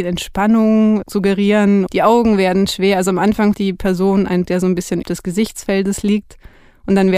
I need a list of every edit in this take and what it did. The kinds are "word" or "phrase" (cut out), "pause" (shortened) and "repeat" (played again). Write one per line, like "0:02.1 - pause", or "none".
0:01.9 - word
0:03.5 - word
0:04.5 - word
0:05.0 - word